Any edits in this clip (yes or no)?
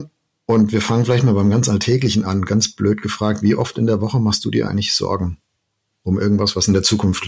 no